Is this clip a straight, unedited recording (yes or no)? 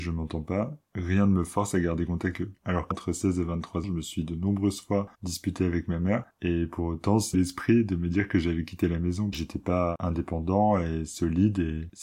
no